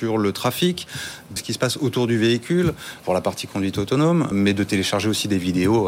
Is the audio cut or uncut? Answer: cut